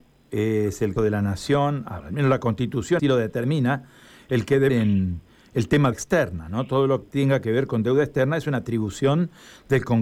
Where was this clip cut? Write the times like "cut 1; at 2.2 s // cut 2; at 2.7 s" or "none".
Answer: cut 1; at 1.0 s // cut 2; at 2.0 s // cut 3; at 3.0 s // cut 4; at 4.7 s // cut 5; at 5.9 s // cut 6; at 7.0 s